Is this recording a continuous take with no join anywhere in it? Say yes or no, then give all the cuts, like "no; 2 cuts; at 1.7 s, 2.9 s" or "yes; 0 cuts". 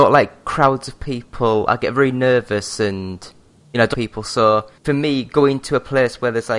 no; 3 cuts; at 3.6 s, 3.9 s, 4.8 s